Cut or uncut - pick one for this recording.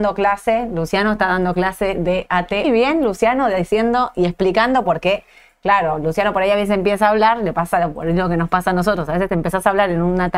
cut